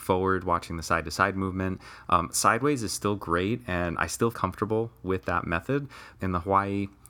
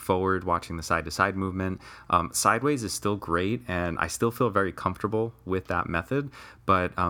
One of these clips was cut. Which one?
first; 2 cuts; at 4.3 s, 6.2 s

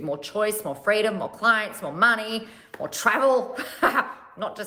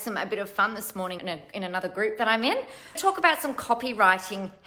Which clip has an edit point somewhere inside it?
second; 2 cuts; at 1.2 s, 2.9 s

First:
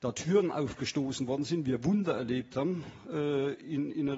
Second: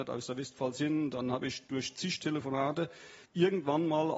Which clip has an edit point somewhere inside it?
second; 1 cut; at 3.2 s

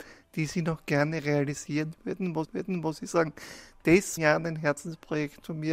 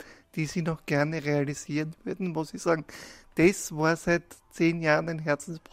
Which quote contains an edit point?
first; 2 cuts; at 2.4 s, 4.2 s

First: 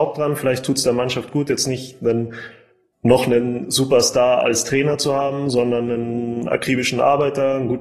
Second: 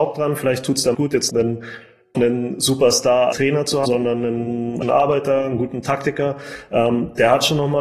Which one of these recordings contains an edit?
second; 6 cuts; at 0.9 s, 1.3 s, 2.1 s, 3.3 s, 3.8 s, 4.8 s

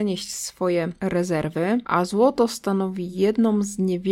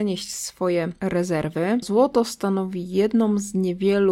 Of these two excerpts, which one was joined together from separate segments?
second; 1 cut; at 1.8 s

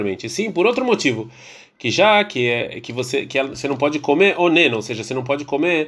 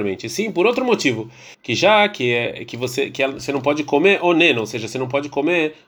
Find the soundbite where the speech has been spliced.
second; 1 cut; at 1.5 s

